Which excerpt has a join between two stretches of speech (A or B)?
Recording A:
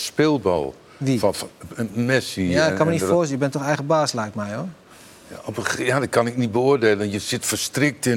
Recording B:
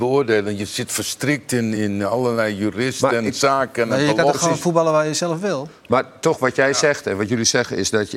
B